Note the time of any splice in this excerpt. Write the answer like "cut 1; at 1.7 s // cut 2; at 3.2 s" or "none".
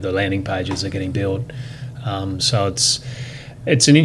none